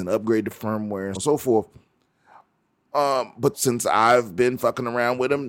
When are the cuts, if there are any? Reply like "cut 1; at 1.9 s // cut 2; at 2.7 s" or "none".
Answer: cut 1; at 1.2 s // cut 2; at 3.5 s

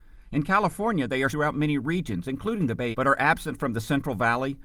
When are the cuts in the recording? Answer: cut 1; at 1.3 s // cut 2; at 2.9 s

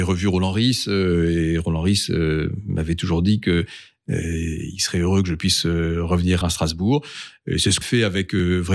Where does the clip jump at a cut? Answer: cut 1; at 6.4 s // cut 2; at 7.8 s

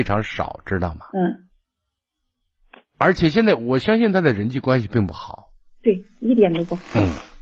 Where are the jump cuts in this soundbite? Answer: cut 1; at 1.1 s // cut 2; at 5.7 s

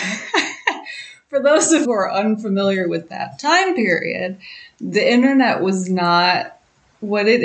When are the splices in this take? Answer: cut 1; at 1.8 s

